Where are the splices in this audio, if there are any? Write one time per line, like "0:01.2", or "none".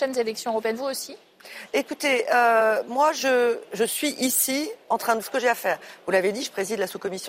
0:05.2